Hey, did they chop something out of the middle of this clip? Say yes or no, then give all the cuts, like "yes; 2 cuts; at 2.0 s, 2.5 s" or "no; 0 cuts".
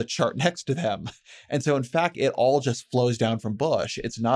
yes; 1 cut; at 2.1 s